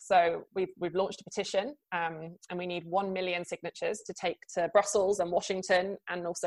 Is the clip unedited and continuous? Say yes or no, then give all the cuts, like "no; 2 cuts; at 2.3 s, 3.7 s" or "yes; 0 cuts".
yes; 0 cuts